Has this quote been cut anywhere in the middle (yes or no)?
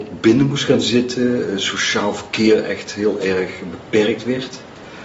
no